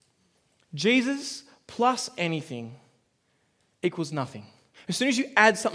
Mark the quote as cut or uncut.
uncut